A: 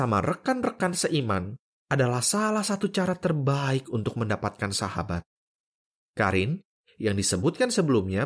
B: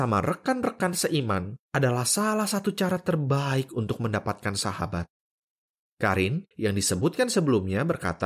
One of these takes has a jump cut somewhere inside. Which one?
B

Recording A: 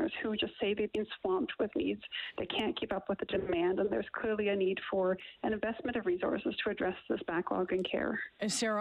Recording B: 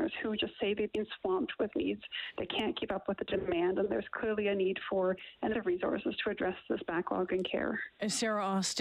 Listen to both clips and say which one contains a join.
B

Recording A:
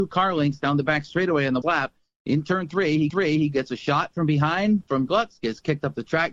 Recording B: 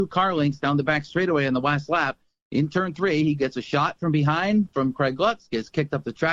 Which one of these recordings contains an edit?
A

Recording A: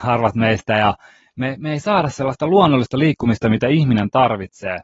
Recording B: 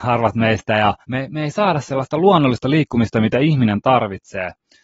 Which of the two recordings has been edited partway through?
B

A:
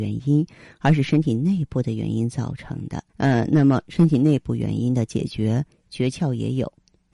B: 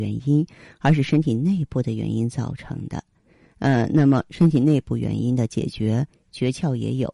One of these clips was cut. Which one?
A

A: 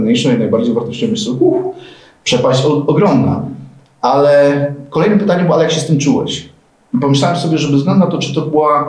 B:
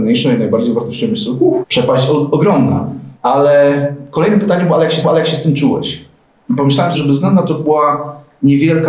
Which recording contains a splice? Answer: B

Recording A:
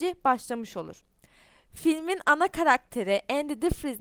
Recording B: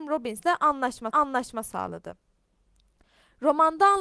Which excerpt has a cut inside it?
B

